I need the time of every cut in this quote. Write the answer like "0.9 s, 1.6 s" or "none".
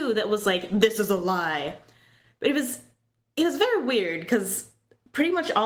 none